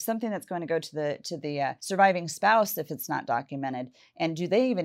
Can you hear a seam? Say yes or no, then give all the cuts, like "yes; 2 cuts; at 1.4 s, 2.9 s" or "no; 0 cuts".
yes; 1 cut; at 1.8 s